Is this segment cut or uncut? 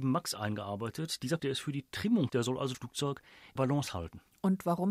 cut